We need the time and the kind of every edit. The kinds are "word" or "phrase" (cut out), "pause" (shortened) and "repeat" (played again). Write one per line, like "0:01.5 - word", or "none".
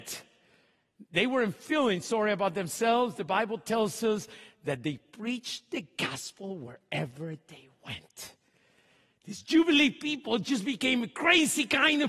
none